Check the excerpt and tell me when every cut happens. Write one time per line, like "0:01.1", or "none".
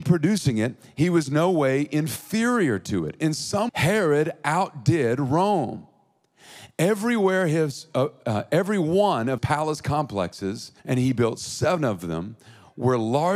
0:03.7
0:08.2
0:09.4
0:10.8

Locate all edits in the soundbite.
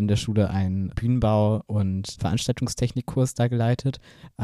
none

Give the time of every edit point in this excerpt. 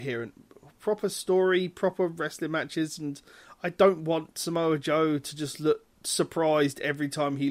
none

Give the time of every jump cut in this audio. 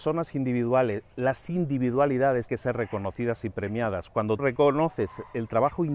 0:01.1
0:02.5
0:04.4

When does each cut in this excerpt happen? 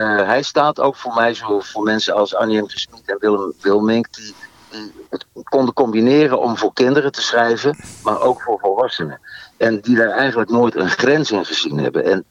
0:05.1

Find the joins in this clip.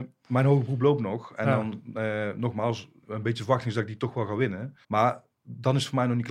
0:03.0
0:04.8

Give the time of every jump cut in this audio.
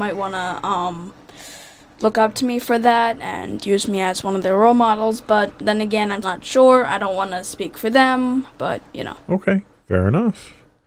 0:06.2

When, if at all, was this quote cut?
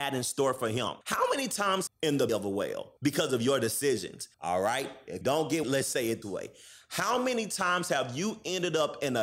0:01.0
0:01.9
0:02.3
0:03.0
0:04.3
0:05.2
0:05.6
0:06.2

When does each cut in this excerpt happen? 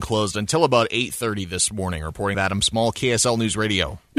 0:02.3

